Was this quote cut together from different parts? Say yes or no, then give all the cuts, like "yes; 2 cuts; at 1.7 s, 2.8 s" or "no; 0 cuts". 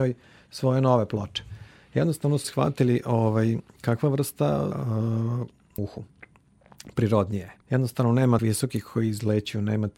yes; 7 cuts; at 1.7 s, 2.4 s, 3.7 s, 4.7 s, 5.8 s, 7.6 s, 8.4 s